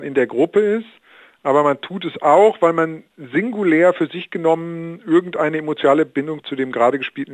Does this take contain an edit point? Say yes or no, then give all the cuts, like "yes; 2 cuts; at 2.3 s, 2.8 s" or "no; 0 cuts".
no; 0 cuts